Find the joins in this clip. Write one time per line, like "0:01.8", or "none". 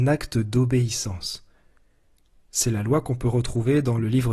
none